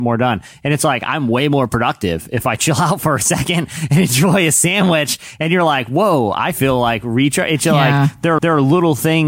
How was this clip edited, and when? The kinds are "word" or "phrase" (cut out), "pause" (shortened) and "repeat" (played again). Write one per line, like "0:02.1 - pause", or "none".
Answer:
0:08.4 - repeat